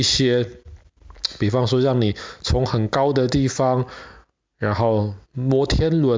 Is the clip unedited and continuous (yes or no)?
yes